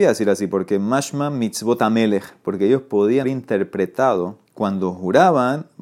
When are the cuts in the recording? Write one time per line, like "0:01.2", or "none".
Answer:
0:03.2
0:04.5